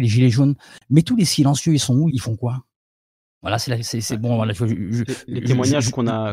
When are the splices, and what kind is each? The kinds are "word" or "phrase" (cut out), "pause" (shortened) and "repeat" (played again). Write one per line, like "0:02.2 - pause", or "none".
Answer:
0:02.1 - word
0:03.2 - pause